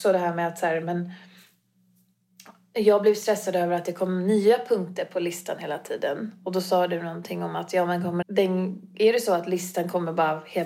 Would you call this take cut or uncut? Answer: cut